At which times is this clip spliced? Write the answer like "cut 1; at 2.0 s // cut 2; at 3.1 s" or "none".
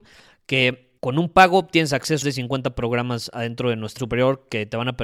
cut 1; at 1.0 s // cut 2; at 2.2 s // cut 3; at 4.0 s